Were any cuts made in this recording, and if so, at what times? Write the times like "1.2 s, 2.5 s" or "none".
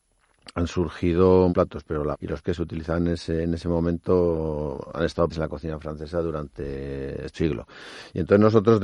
1.5 s, 2.1 s, 2.4 s, 5.3 s, 7.3 s